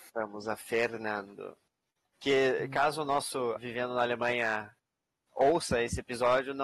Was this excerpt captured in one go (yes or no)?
no